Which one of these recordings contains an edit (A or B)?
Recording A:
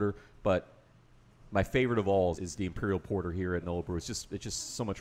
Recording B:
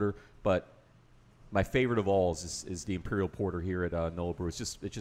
A